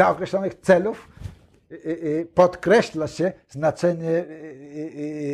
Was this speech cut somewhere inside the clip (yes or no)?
no